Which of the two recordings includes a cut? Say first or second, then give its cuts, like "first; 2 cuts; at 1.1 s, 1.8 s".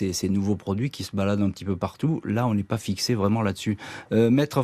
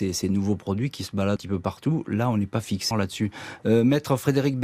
second; 2 cuts; at 1.4 s, 2.9 s